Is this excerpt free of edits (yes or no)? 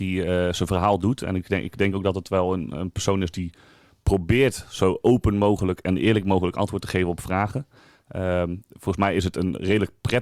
yes